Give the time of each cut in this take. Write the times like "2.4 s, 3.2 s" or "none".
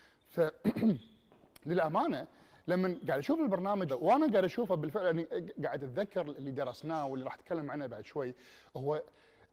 3.9 s